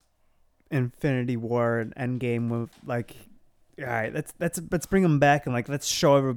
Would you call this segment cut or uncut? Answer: uncut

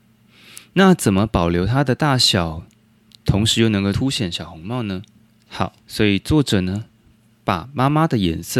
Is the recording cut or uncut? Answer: cut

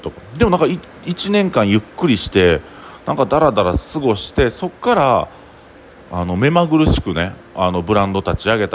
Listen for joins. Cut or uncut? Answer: uncut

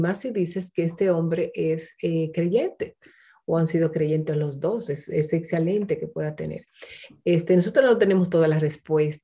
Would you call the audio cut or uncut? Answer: uncut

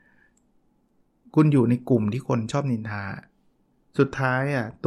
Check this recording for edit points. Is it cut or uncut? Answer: uncut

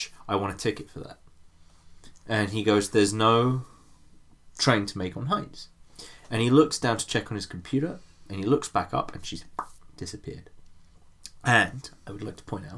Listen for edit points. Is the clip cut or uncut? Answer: uncut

